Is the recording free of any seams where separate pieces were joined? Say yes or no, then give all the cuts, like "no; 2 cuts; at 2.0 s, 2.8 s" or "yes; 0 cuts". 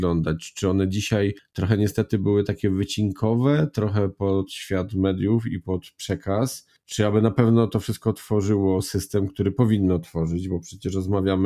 yes; 0 cuts